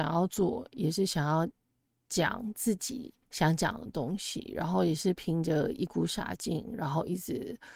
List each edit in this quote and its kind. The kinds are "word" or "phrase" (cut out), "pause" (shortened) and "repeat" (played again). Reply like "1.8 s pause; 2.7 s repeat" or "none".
3.2 s pause